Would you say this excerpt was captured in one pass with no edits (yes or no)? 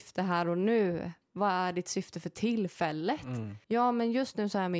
no